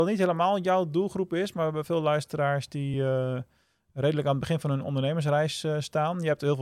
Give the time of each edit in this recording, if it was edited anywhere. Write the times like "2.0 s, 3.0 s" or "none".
none